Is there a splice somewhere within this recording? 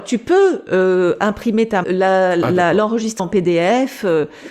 yes; 2 cuts; at 1.8 s, 3.2 s

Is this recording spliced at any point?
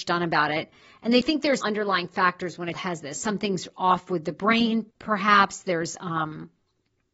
yes; 3 cuts; at 1.6 s, 2.7 s, 4.9 s

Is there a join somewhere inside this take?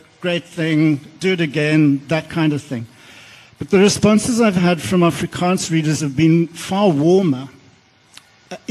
no; 0 cuts

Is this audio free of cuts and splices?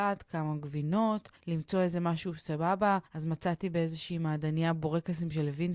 no; 2 cuts; at 1.4 s, 3.1 s

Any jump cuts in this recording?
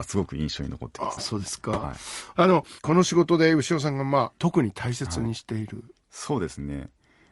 yes; 2 cuts; at 1.2 s, 2.8 s

